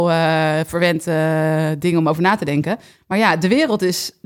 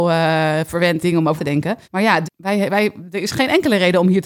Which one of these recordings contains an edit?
second; 4 cuts; at 1.0 s, 1.4 s, 1.8 s, 2.2 s

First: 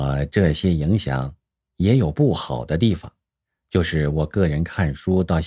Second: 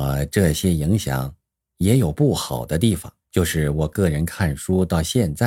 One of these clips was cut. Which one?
second; 1 cut; at 3.2 s

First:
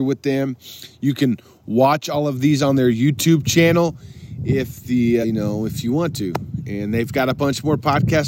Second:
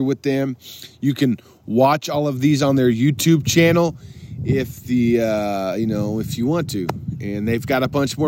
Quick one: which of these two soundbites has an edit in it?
first; 1 cut; at 5.2 s

